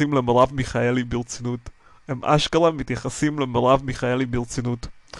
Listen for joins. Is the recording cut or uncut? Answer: cut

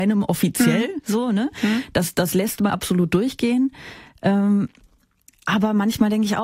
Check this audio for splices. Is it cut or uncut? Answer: cut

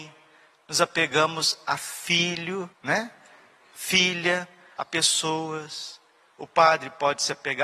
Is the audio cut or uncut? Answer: cut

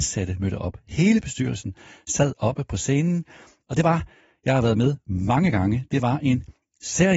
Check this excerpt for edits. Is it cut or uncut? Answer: uncut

